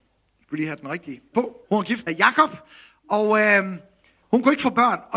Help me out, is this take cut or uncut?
cut